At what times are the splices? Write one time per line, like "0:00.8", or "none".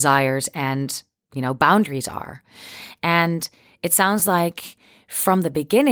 none